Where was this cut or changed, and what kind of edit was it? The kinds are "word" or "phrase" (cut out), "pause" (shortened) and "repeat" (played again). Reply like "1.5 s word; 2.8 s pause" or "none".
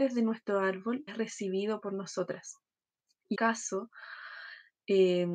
1.1 s word; 3.3 s word